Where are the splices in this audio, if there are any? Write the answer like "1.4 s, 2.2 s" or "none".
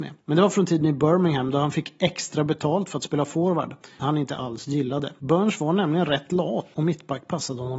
4.0 s